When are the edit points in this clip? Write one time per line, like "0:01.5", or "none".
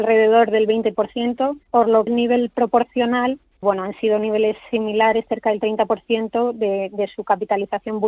0:01.6
0:02.1
0:03.6